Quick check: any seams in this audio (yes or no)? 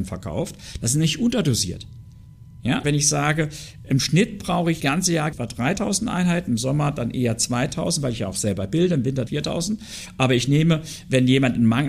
yes